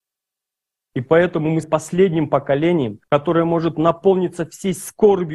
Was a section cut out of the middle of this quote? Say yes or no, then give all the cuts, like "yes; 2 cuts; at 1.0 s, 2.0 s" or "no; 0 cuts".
yes; 2 cuts; at 1.6 s, 3.0 s